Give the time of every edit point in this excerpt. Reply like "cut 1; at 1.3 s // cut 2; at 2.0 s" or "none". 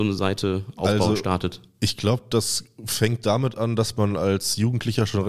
none